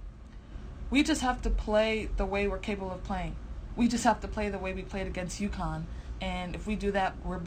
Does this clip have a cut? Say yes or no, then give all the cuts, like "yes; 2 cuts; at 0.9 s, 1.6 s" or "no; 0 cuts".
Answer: no; 0 cuts